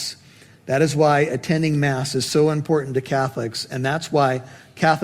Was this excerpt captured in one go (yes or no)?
yes